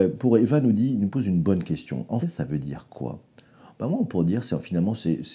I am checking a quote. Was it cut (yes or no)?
yes